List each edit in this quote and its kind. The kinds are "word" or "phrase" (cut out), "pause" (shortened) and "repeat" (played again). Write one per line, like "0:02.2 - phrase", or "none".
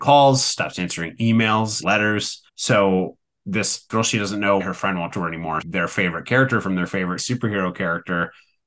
0:01.8 - word
0:02.5 - pause
0:03.9 - word
0:04.6 - word
0:05.1 - word
0:05.6 - phrase
0:07.2 - phrase